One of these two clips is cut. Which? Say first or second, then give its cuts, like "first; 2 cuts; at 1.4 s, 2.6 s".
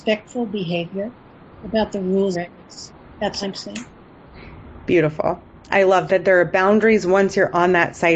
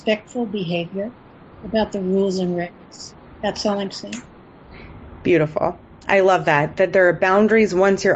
first; 3 cuts; at 2.3 s, 3.4 s, 6.1 s